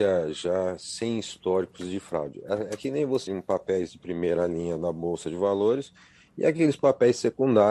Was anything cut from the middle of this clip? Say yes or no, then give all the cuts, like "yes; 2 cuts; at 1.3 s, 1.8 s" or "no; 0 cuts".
yes; 1 cut; at 3.3 s